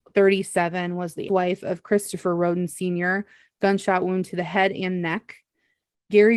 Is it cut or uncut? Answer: cut